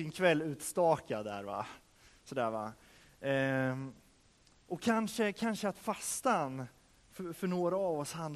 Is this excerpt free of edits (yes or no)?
yes